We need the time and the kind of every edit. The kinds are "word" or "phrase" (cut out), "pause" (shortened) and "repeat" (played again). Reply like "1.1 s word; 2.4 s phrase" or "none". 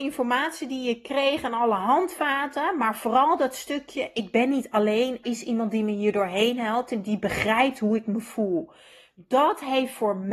5.2 s word

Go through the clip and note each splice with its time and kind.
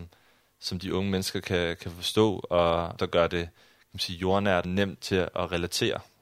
3.0 s phrase; 4.6 s phrase

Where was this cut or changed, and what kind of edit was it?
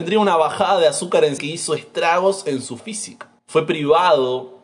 1.4 s word; 2.8 s word; 3.4 s pause

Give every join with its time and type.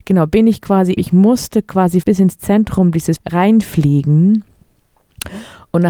1.0 s word; 2.0 s word; 3.2 s phrase

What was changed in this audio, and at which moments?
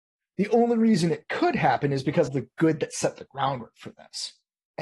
2.3 s word

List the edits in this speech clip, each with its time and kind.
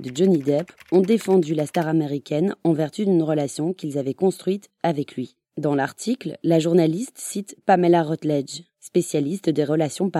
none

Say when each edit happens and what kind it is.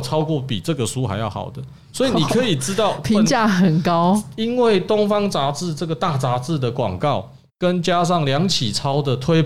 none

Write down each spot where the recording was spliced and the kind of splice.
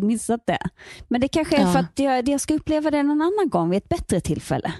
none

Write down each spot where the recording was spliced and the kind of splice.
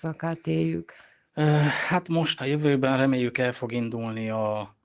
2.4 s word

